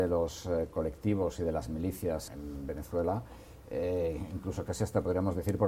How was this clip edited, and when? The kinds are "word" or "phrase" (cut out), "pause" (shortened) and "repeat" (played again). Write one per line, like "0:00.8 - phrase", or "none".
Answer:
0:02.3 - word